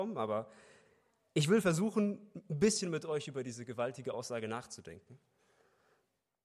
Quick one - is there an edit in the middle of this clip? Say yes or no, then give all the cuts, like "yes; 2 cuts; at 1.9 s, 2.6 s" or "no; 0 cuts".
no; 0 cuts